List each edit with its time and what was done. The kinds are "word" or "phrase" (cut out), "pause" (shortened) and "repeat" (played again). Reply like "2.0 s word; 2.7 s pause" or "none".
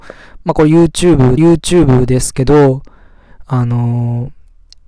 1.4 s repeat